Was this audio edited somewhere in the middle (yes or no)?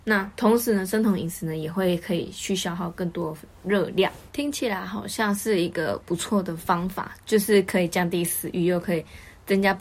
yes